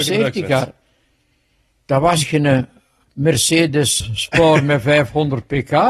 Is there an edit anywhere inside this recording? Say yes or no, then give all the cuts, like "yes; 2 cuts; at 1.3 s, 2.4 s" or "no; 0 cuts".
yes; 1 cut; at 4.0 s